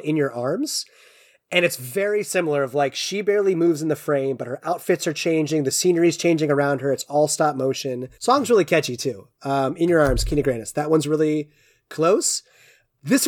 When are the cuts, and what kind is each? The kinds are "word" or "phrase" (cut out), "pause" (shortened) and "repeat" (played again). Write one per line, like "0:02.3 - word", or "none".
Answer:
0:08.1 - pause